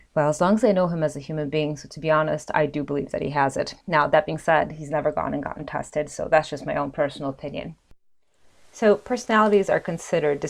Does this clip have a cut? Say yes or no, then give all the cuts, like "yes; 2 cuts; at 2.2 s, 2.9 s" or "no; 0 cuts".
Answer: yes; 2 cuts; at 3.8 s, 8.6 s